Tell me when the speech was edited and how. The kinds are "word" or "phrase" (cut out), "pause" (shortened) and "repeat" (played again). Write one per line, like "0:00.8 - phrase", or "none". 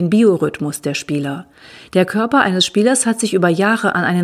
none